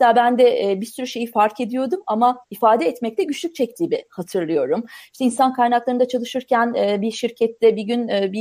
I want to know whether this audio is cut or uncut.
cut